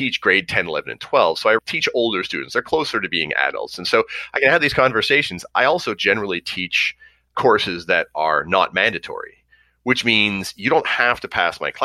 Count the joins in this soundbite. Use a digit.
0